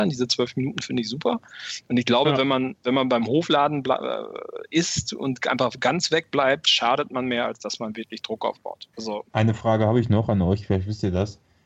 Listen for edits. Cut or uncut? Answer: cut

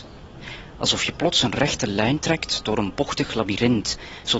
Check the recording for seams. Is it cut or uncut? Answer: uncut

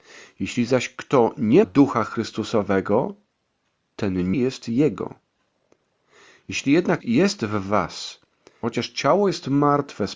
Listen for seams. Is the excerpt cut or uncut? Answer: cut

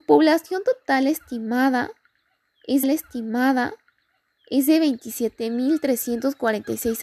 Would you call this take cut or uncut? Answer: cut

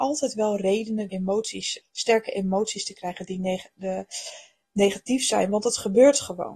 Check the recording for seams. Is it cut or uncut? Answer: cut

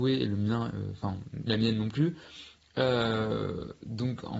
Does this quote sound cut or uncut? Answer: cut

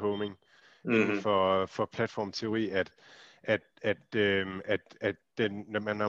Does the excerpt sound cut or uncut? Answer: uncut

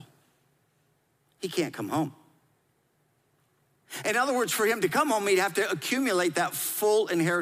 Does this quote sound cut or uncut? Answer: uncut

